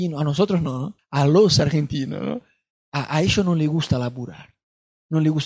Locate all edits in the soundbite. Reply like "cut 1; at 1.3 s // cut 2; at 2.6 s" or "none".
cut 1; at 1.0 s

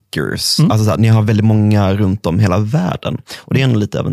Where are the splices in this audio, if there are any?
cut 1; at 1.0 s

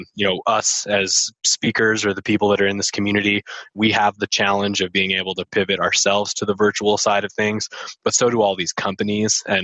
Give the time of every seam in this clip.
none

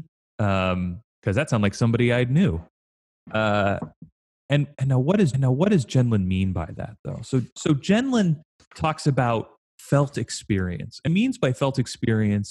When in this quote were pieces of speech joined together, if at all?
cut 1; at 5.3 s // cut 2; at 8.6 s // cut 3; at 11.1 s

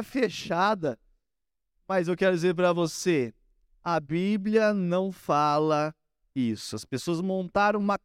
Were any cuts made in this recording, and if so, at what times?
none

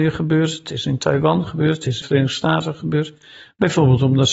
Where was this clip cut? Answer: cut 1; at 2.0 s

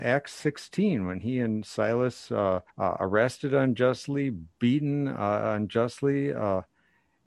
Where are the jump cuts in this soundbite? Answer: cut 1; at 2.7 s // cut 2; at 4.5 s

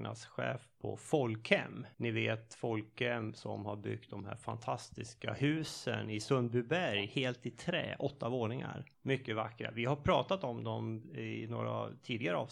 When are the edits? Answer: cut 1; at 1.9 s // cut 2; at 8.9 s

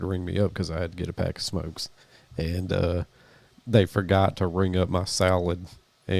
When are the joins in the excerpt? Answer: none

